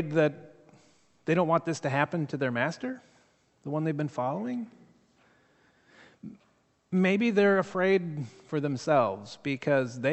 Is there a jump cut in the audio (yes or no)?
no